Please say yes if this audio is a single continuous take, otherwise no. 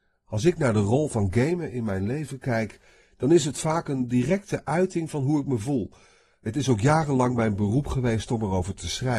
yes